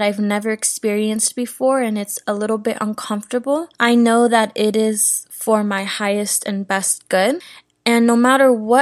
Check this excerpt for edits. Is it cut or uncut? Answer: cut